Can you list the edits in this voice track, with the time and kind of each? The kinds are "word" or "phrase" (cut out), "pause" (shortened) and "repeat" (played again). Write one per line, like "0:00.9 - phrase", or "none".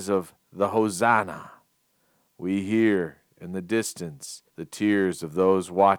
0:04.5 - pause